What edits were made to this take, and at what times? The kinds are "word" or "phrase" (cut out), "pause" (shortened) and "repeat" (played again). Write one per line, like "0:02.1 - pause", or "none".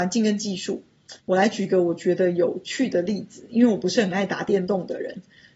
0:01.2 - pause